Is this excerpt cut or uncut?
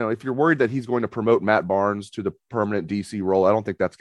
uncut